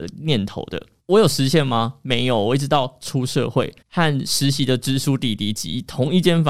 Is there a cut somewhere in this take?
yes; 1 cut; at 3.8 s

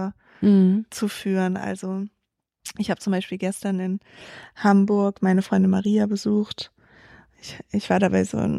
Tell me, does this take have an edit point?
no; 0 cuts

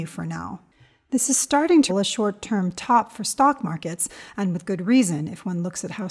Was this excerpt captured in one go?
no; 1 cut; at 1.9 s

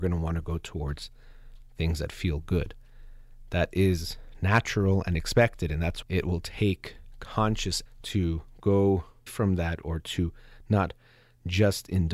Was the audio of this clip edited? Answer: yes; 3 cuts; at 6.0 s, 7.9 s, 9.3 s

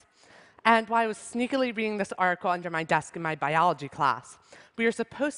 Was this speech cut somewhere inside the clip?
no; 0 cuts

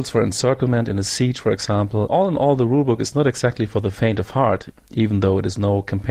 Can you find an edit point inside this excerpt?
yes; 1 cut; at 2.1 s

